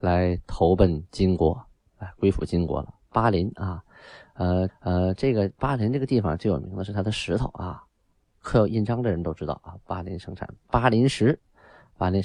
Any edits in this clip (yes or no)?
yes